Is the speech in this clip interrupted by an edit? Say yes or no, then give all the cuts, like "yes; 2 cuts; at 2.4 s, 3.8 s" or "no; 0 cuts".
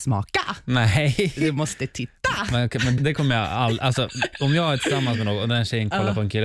yes; 1 cut; at 3.0 s